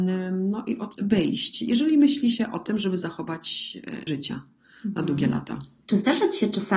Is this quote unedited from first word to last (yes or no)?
no